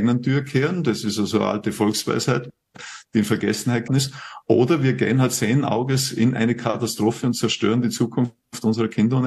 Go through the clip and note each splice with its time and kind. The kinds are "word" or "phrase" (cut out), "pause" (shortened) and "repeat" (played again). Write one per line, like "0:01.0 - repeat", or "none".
0:03.9 - word